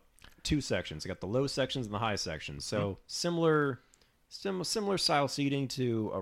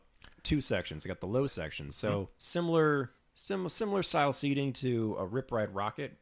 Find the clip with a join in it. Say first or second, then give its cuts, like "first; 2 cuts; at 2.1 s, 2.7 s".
second; 2 cuts; at 1.5 s, 3.2 s